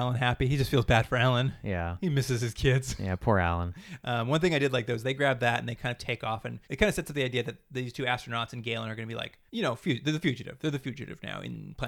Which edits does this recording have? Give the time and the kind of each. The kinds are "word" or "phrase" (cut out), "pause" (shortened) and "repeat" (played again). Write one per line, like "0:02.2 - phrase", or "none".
0:06.6 - pause
0:09.5 - pause